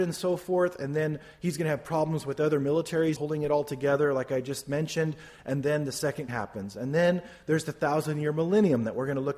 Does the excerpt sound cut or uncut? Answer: cut